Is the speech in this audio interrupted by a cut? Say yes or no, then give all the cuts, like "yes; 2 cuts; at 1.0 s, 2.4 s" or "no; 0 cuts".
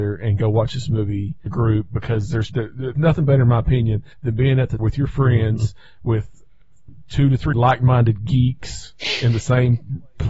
yes; 6 cuts; at 1.5 s, 2.5 s, 2.9 s, 4.1 s, 4.8 s, 7.5 s